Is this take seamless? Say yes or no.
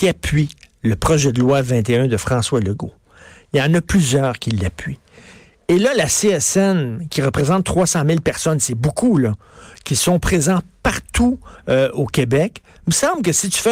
yes